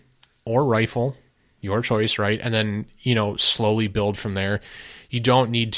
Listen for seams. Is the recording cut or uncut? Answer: uncut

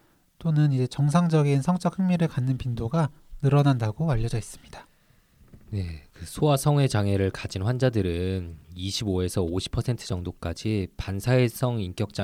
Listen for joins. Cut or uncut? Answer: uncut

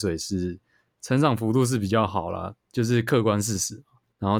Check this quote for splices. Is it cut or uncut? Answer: uncut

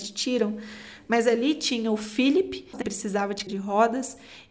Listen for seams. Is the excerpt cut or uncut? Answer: cut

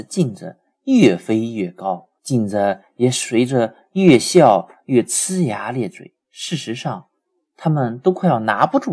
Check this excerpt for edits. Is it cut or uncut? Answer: cut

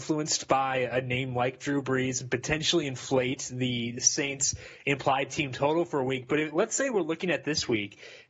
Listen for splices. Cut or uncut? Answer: uncut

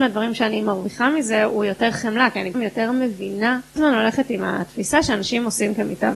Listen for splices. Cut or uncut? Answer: cut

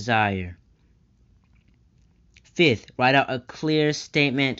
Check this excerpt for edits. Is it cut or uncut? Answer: uncut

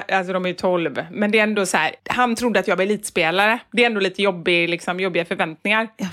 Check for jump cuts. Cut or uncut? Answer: cut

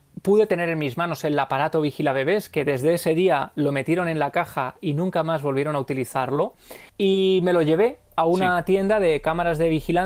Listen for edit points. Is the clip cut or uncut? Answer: cut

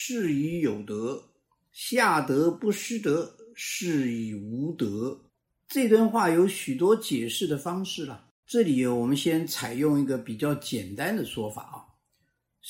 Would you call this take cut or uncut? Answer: cut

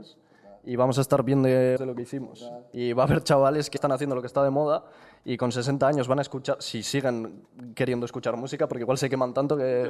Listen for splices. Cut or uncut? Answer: cut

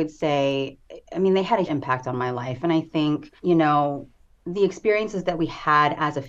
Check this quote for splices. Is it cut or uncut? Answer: cut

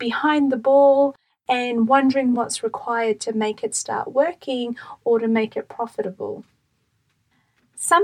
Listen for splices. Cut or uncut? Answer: uncut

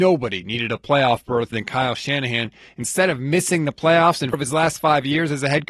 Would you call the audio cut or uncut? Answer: cut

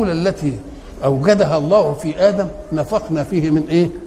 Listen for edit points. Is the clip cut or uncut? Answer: uncut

